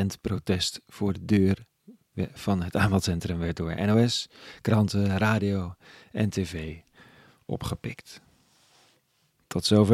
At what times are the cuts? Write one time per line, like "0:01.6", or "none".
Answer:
none